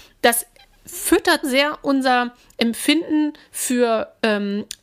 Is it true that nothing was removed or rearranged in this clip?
no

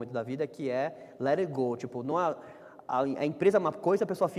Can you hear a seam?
no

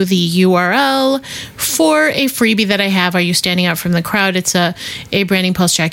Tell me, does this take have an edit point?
no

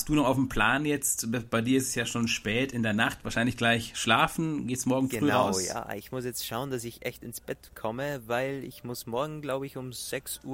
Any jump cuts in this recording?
no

